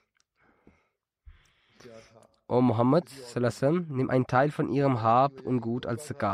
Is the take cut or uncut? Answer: uncut